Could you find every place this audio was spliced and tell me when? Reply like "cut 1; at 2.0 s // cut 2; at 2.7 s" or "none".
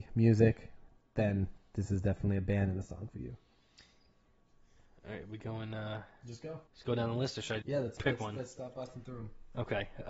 cut 1; at 6.7 s // cut 2; at 7.6 s